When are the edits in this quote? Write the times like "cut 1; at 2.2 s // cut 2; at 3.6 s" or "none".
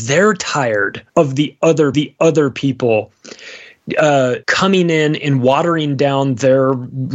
cut 1; at 1.1 s // cut 2; at 1.9 s // cut 3; at 4.4 s